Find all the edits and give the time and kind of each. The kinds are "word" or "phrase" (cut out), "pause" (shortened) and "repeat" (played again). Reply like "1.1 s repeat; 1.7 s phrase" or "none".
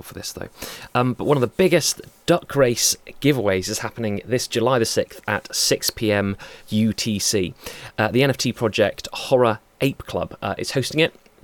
6.6 s pause